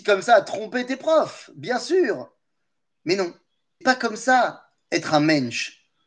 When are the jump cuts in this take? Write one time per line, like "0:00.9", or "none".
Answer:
0:03.8